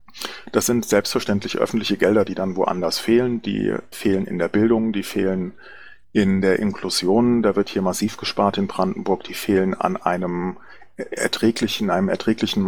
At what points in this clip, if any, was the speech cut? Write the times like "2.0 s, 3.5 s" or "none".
3.9 s